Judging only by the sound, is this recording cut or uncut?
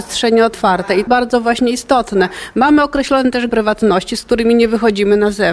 cut